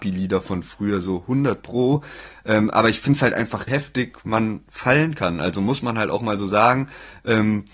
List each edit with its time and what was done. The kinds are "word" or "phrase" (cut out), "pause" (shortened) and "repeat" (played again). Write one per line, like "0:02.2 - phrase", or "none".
0:03.7 - phrase